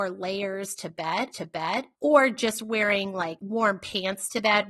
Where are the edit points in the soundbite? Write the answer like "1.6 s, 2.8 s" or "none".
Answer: 1.3 s